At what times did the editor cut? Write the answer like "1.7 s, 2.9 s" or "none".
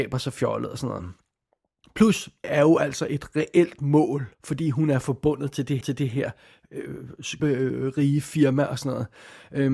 2.4 s, 4.3 s, 5.8 s, 7.4 s